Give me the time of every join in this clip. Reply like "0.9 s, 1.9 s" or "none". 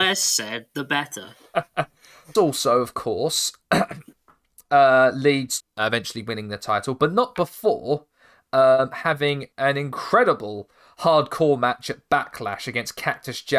2.4 s, 5.6 s, 9.5 s